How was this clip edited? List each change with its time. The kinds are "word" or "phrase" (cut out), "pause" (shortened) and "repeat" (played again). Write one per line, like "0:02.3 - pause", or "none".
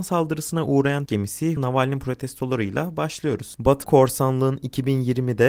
0:01.1 - word
0:01.6 - phrase
0:03.8 - word